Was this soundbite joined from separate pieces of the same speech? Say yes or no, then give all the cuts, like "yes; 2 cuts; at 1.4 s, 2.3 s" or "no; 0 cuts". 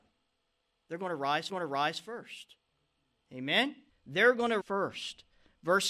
yes; 3 cuts; at 1.5 s, 3.9 s, 4.6 s